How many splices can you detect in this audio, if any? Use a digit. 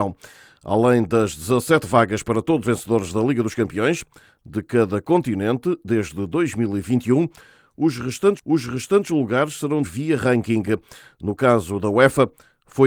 3